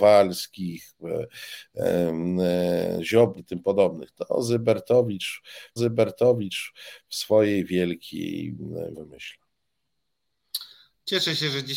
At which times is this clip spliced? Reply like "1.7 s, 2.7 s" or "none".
3.4 s, 5.8 s, 8.9 s

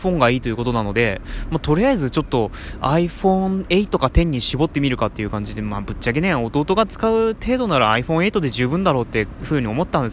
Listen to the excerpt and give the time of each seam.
none

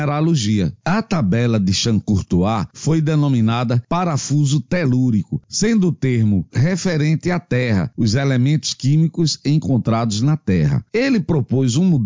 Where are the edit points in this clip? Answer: 6.5 s

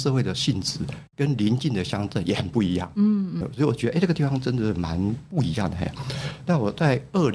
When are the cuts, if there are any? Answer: 3.4 s

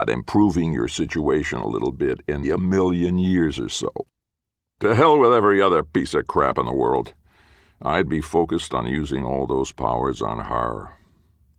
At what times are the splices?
2.4 s

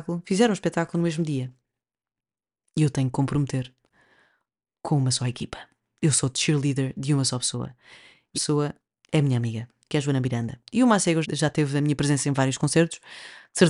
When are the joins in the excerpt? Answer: 8.3 s, 11.2 s

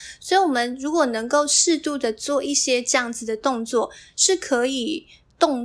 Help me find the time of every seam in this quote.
none

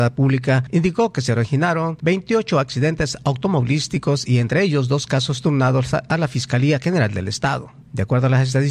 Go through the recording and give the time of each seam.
none

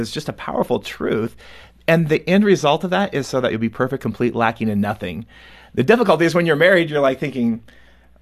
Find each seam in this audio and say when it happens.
none

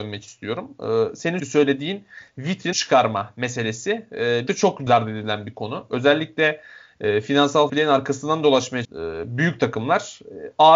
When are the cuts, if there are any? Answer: 1.4 s, 2.7 s, 4.5 s, 4.9 s, 7.7 s, 8.8 s

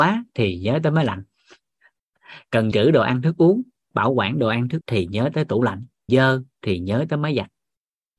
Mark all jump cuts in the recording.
2.7 s, 3.9 s, 4.8 s, 6.1 s

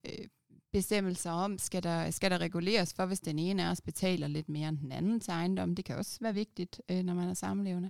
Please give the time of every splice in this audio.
none

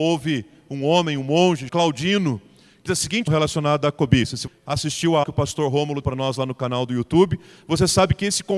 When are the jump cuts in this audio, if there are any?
1.7 s, 2.9 s, 3.3 s, 4.5 s, 5.2 s, 6.0 s

